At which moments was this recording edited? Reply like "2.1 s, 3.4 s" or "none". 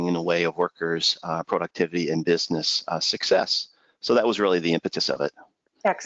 none

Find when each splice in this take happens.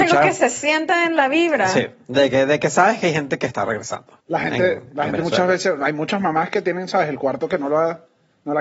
4.2 s

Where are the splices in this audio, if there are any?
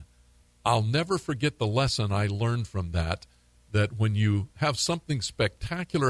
none

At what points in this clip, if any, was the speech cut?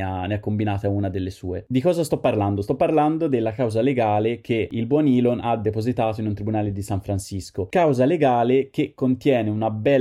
none

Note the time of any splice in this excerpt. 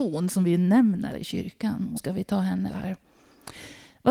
1.1 s, 2.0 s, 2.7 s

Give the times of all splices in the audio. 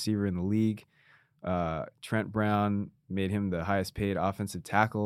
none

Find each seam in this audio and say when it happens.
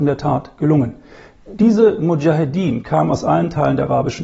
none

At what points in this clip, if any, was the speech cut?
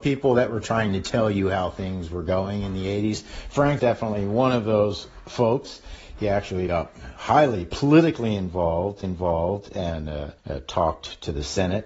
3.8 s, 6.7 s, 9.0 s, 10.4 s

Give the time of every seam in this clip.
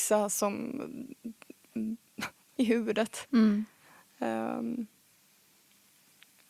2.6 s

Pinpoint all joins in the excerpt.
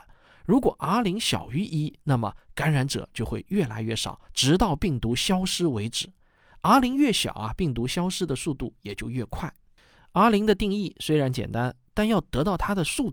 4.2 s

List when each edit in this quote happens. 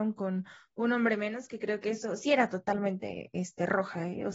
2.2 s

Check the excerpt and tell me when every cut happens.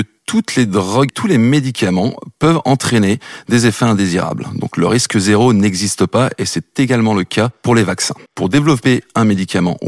1.1 s, 8.3 s

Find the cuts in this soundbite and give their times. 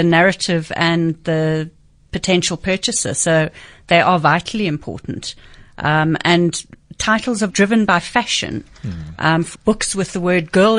7.5 s, 9.5 s

